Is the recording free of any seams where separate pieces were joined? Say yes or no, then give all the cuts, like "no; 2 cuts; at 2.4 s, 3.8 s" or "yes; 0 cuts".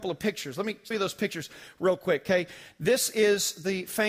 no; 1 cut; at 0.9 s